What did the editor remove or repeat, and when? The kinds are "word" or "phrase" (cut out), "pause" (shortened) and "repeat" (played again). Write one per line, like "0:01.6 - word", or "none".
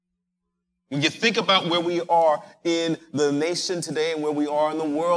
none